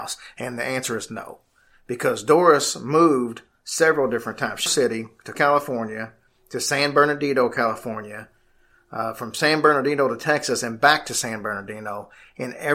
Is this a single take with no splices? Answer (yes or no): no